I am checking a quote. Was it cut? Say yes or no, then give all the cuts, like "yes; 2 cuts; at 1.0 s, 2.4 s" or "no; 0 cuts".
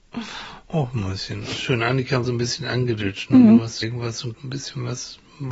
yes; 4 cuts; at 1.5 s, 2.2 s, 3.8 s, 4.3 s